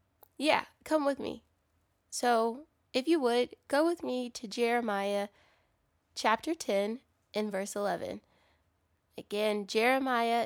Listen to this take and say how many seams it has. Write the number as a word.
zero